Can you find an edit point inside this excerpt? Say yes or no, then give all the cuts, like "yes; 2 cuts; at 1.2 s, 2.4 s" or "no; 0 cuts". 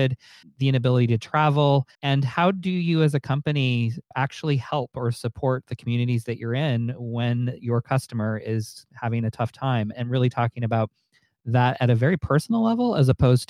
yes; 1 cut; at 1.9 s